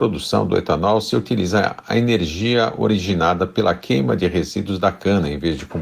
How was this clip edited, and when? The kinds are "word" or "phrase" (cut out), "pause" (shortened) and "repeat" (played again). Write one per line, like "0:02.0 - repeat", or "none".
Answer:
none